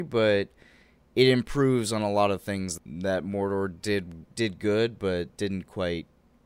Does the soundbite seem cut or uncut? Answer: cut